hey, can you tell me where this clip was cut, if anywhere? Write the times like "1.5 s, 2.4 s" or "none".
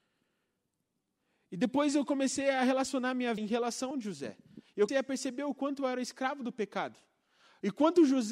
3.4 s, 3.9 s, 4.9 s